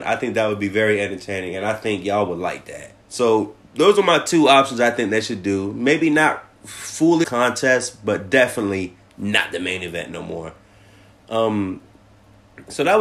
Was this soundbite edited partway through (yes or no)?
yes